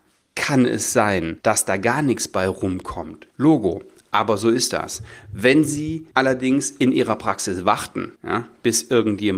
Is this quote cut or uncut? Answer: cut